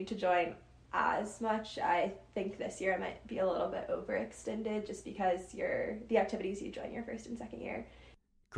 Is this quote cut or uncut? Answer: uncut